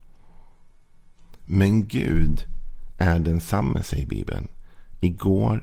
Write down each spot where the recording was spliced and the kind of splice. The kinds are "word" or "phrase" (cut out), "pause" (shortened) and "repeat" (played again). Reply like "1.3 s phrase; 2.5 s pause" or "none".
none